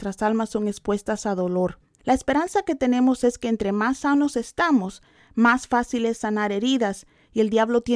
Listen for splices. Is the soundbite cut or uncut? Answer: uncut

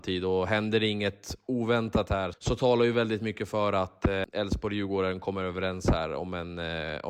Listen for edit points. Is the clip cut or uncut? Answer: cut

